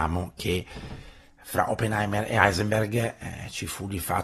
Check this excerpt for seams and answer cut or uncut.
uncut